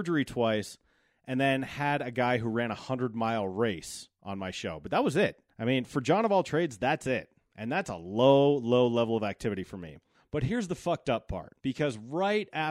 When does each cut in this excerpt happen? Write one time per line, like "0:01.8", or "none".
0:05.5
0:10.1
0:11.6